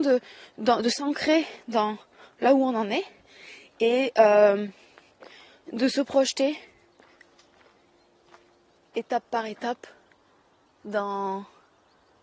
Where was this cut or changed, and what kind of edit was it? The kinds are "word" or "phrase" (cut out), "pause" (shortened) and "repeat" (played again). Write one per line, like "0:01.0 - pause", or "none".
none